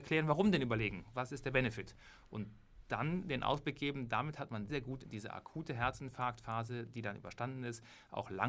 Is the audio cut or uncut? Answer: cut